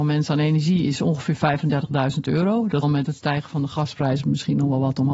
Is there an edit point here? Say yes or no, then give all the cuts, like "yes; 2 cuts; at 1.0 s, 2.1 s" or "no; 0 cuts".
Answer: yes; 1 cut; at 2.8 s